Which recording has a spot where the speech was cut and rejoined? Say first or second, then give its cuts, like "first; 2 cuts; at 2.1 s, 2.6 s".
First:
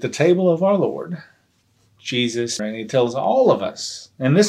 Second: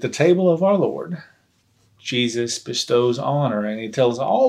first; 1 cut; at 2.6 s